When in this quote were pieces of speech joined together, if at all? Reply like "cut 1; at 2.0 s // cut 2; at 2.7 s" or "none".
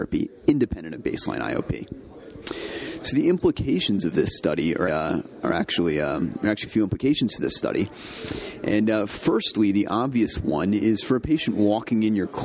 cut 1; at 4.9 s // cut 2; at 6.7 s